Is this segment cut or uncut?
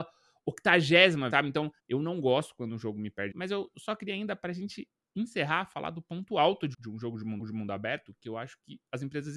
cut